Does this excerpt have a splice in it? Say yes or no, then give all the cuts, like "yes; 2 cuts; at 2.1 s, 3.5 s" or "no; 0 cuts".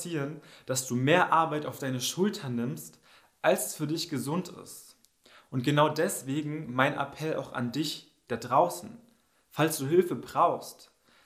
no; 0 cuts